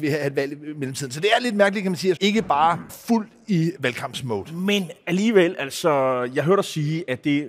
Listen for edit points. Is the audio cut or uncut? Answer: cut